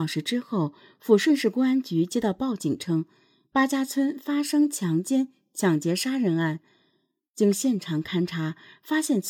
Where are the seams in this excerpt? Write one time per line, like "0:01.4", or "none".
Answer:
none